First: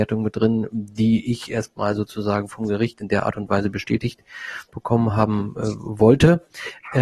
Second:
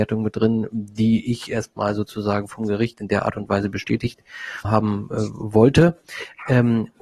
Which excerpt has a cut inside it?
second; 1 cut; at 4.6 s

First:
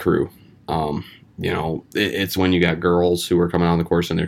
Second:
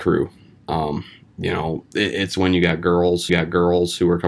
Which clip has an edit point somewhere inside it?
second; 1 cut; at 3.3 s

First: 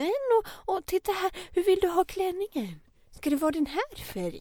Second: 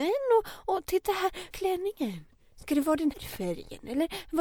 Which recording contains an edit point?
second; 2 cuts; at 1.5 s, 3.1 s

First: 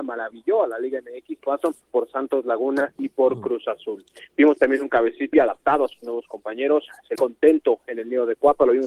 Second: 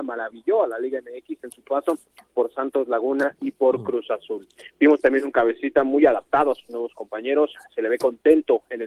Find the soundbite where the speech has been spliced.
first; 4 cuts; at 1.4 s, 1.8 s, 5.3 s, 7.1 s

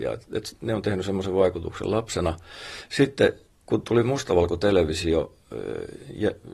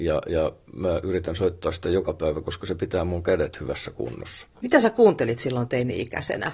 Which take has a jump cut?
second; 1 cut; at 4.5 s

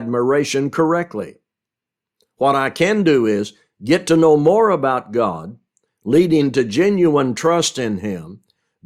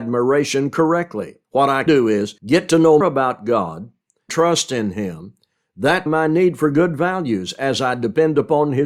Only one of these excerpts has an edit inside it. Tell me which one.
second; 6 cuts; at 1.4 s, 1.9 s, 2.4 s, 3.0 s, 4.3 s, 6.1 s

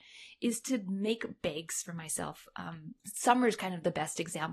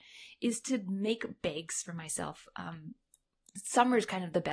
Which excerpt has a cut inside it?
first; 1 cut; at 3.0 s

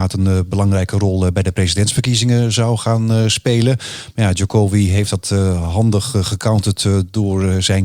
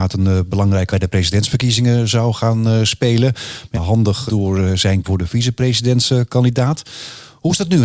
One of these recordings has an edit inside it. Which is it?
second; 4 cuts; at 0.9 s, 3.7 s, 4.3 s, 5.0 s

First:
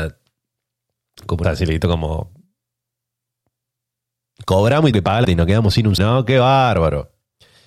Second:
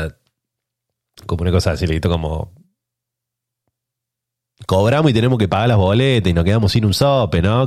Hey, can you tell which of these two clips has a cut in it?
first; 4 cuts; at 1.4 s, 4.9 s, 5.2 s, 6.0 s

